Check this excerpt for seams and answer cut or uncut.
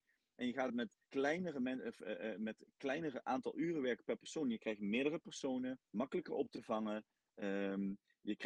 cut